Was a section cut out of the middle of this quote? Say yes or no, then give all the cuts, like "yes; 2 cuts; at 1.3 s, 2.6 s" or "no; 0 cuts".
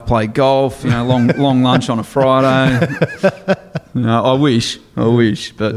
no; 0 cuts